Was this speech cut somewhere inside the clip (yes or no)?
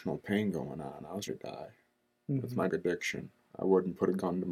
yes